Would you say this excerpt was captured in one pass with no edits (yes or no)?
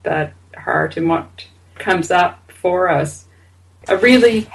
yes